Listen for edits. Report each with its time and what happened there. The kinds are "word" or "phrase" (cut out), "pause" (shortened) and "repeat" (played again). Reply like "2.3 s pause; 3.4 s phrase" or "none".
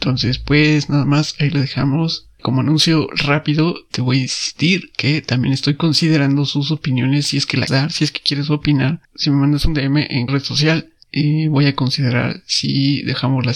7.7 s word; 9.0 s pause; 10.3 s word